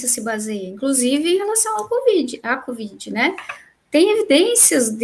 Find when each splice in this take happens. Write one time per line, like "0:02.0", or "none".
none